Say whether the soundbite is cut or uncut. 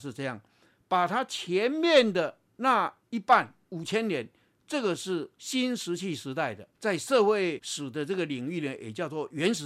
cut